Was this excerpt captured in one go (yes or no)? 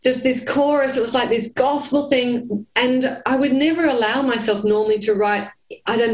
yes